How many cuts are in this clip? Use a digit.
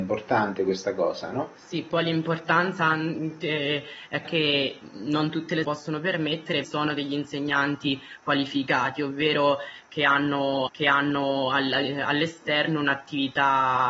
5